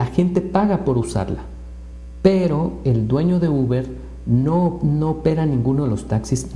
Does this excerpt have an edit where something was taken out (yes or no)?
no